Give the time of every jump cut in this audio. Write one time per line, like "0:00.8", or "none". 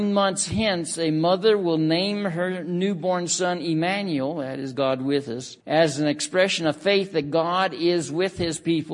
0:05.6